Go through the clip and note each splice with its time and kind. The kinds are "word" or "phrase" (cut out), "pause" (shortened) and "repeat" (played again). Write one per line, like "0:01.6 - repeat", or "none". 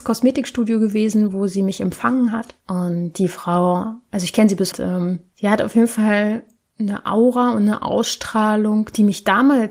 0:02.6 - pause
0:04.7 - phrase
0:05.3 - pause